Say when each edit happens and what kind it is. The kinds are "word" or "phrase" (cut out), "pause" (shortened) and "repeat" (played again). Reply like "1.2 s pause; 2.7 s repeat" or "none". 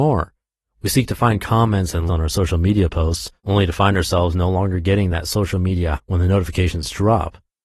2.1 s word; 3.4 s pause; 5.9 s word